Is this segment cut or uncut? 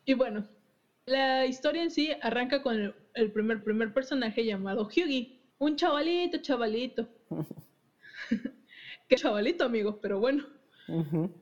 cut